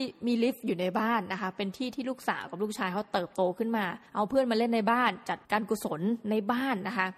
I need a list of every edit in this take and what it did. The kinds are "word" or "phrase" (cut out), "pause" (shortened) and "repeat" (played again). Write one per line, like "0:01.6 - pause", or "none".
0:04.1 - pause
0:05.4 - pause